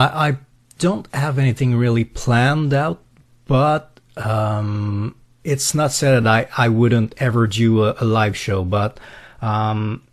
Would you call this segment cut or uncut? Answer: uncut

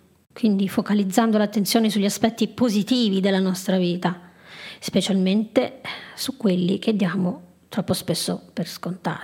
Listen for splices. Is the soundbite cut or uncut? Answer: uncut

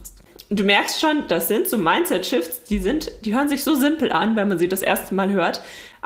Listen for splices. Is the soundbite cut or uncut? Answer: uncut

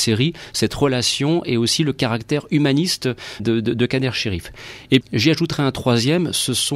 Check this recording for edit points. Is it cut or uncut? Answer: cut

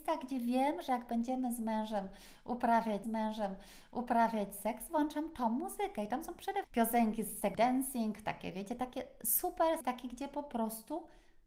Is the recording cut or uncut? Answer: cut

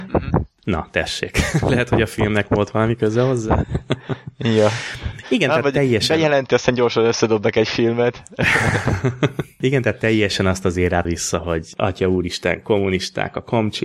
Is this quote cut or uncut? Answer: cut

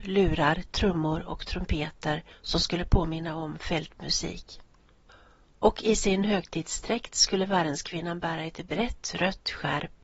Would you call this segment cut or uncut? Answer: uncut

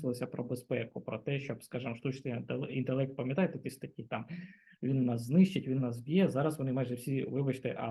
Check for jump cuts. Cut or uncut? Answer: uncut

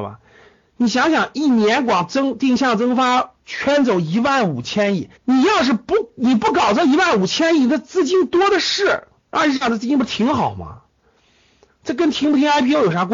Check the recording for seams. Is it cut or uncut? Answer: cut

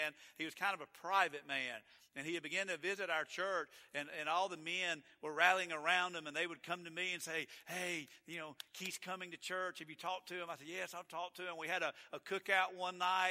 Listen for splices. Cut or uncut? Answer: uncut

